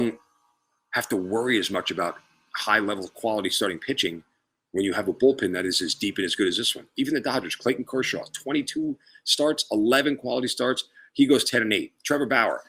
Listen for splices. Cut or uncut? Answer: uncut